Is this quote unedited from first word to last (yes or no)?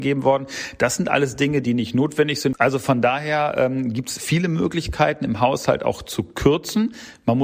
yes